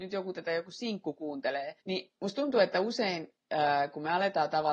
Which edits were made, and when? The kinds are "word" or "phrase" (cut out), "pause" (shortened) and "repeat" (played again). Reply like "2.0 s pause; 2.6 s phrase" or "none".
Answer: 1.8 s pause; 3.4 s pause